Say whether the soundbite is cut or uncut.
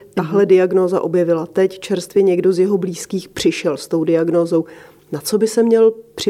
uncut